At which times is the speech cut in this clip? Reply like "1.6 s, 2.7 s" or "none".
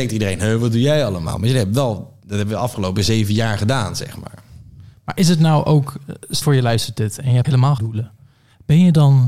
6.4 s, 7.4 s, 7.8 s